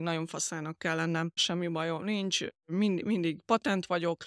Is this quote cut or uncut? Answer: cut